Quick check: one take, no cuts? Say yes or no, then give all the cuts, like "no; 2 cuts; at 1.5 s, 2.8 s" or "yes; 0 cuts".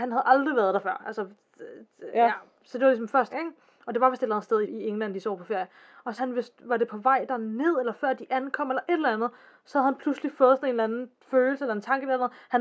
no; 3 cuts; at 3.3 s, 4.6 s, 6.2 s